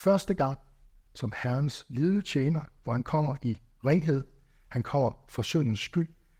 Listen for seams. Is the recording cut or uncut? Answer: uncut